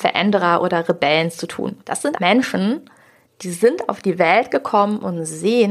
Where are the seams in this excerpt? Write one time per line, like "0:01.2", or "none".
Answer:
0:01.8
0:02.2

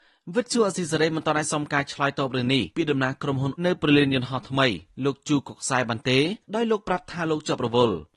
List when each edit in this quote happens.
0:02.7
0:03.6
0:06.4

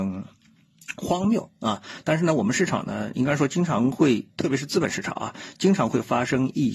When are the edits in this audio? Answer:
0:03.1

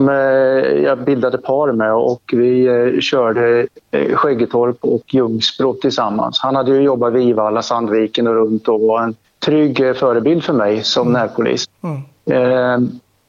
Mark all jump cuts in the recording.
0:09.2

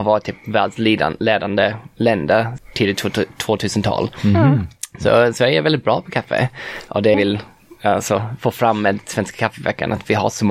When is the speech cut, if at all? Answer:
0:02.6
0:07.1

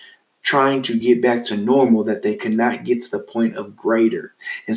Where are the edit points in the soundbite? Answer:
none

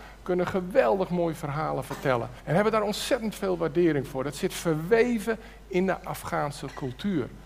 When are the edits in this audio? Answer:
0:02.4

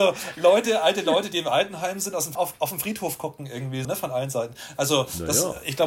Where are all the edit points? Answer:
0:02.3
0:03.8

